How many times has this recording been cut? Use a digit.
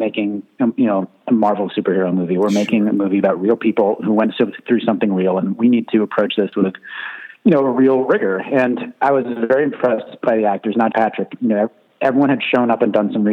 1